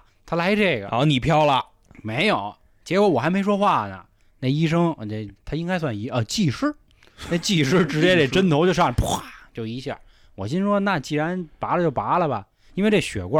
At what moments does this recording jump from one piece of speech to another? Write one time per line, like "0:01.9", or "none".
none